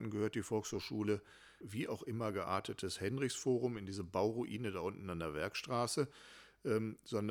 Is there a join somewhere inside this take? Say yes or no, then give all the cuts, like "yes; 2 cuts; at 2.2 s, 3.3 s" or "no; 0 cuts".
yes; 1 cut; at 1.6 s